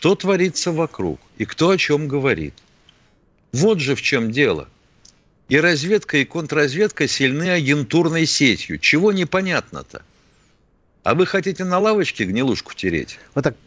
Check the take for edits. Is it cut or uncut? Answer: uncut